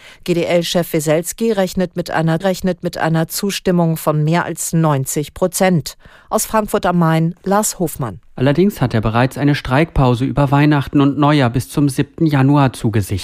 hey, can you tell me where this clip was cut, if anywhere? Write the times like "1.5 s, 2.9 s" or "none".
2.4 s, 8.2 s